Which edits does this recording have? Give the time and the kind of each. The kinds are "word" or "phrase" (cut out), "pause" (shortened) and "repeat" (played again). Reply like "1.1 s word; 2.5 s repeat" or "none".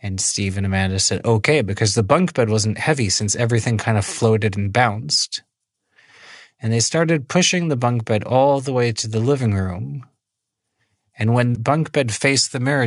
11.5 s word